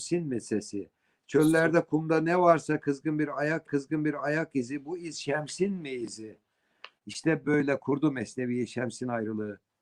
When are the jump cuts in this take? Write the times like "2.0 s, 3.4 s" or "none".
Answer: 3.7 s, 7.4 s